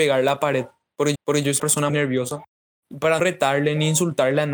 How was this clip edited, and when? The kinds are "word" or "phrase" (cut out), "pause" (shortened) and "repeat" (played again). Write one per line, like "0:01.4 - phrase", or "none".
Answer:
0:01.2 - repeat
0:01.6 - word
0:01.9 - word
0:03.2 - word